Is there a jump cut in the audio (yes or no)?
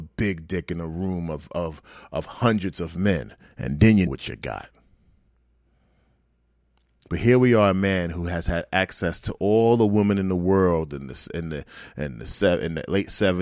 yes